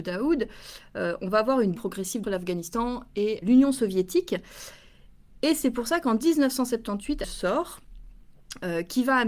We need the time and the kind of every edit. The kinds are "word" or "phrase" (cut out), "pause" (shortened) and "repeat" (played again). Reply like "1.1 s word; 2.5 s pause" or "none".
1.8 s word; 2.2 s phrase; 3.4 s word; 7.2 s phrase

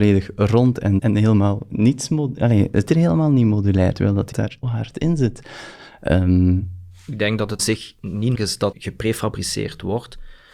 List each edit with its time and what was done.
1.0 s word; 2.9 s word; 3.9 s word; 4.3 s word; 4.6 s word; 7.6 s word; 8.3 s word; 8.7 s word

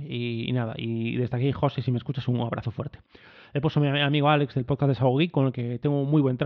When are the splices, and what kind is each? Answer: none

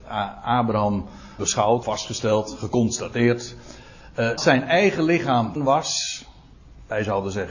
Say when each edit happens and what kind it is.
1.4 s word; 1.8 s word; 4.4 s word; 5.6 s word

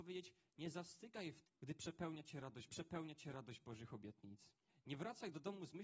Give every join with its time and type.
1.4 s word; 2.7 s repeat; 4.7 s pause

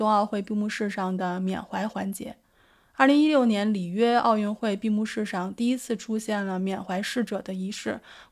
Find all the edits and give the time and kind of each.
none

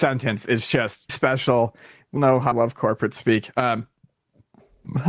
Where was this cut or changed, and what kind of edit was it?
1.1 s word; 2.2 s word; 2.5 s word

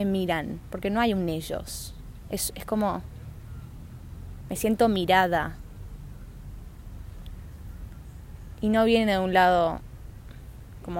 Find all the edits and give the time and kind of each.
none

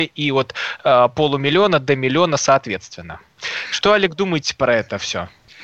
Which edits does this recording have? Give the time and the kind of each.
none

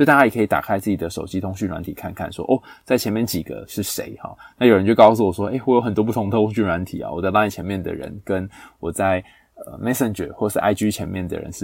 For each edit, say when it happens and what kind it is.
none

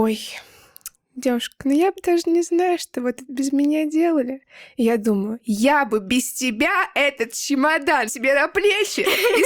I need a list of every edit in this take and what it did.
8.1 s word

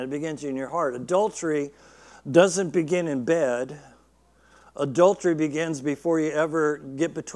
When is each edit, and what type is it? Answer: none

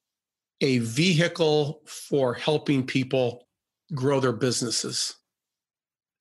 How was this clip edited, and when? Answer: none

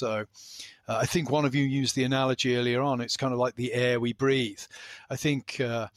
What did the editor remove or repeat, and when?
none

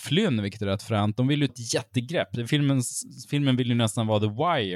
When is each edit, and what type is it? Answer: 1.5 s word

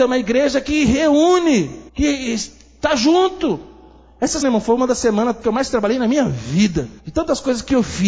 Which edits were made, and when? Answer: 1.9 s pause; 4.4 s word; 5.4 s word; 7.0 s pause

